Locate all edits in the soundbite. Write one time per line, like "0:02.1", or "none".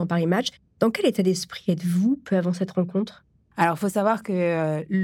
none